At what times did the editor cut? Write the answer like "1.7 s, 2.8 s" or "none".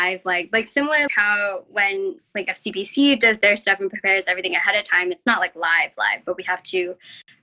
1.1 s